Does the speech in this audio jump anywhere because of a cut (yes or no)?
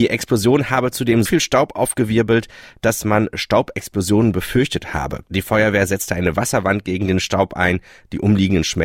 yes